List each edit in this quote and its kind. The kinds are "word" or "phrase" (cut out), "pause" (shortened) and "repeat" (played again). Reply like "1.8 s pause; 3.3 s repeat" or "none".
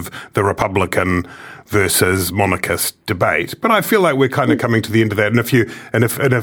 none